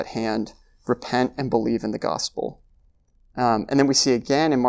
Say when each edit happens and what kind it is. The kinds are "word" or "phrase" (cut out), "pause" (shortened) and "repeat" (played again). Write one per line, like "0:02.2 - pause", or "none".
none